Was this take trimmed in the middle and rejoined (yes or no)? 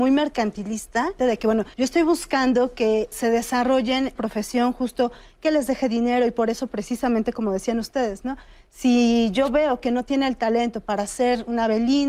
yes